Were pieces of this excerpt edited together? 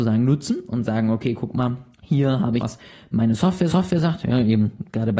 yes; 3 cuts; at 1.9 s, 2.6 s, 3.7 s

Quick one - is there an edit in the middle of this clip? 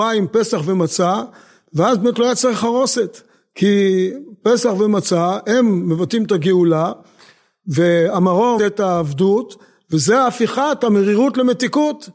yes; 1 cut; at 8.6 s

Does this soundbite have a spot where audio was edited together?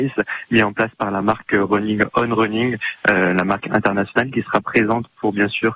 no; 0 cuts

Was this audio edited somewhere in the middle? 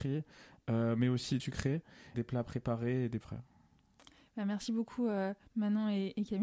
yes; 3 cuts; at 1.4 s, 2.1 s, 3.2 s

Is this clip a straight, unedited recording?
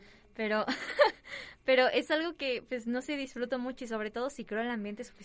yes; 0 cuts

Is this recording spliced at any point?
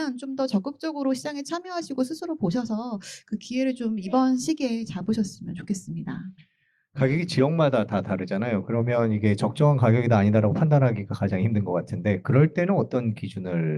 no; 0 cuts

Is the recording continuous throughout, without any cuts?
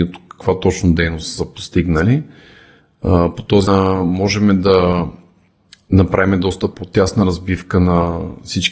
no; 1 cut; at 3.7 s

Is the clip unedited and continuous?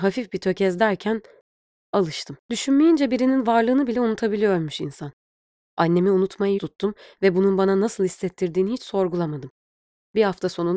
no; 2 cuts; at 2.4 s, 6.6 s

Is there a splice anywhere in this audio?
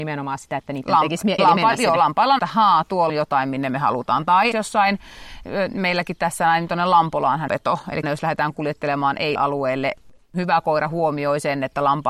yes; 7 cuts; at 1.4 s, 2.4 s, 3.1 s, 4.5 s, 7.5 s, 8.0 s, 9.4 s

